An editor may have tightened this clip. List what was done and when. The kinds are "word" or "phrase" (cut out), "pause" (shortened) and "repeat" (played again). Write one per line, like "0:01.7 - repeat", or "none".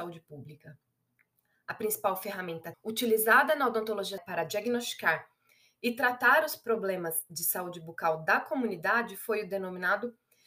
0:02.7 - word
0:04.2 - word